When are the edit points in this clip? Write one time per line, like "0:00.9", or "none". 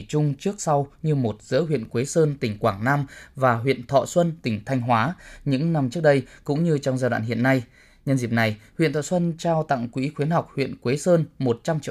none

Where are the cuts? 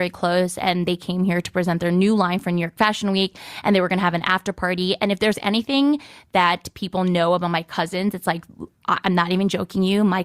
none

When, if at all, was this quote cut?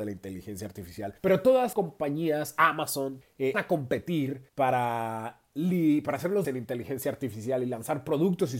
0:01.2
0:01.7
0:03.2
0:03.5
0:04.5
0:06.4

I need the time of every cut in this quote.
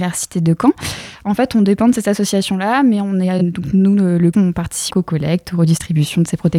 0:04.3
0:04.9

